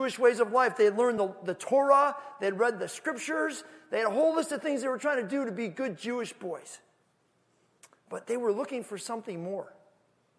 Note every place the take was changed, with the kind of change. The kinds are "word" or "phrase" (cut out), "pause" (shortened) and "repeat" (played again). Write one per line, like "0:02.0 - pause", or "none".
none